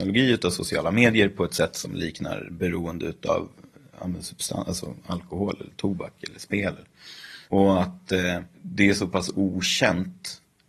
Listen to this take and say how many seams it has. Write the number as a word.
two